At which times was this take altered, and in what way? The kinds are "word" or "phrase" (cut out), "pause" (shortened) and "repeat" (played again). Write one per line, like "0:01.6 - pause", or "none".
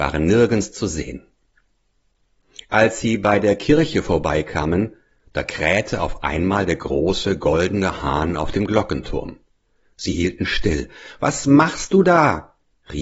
none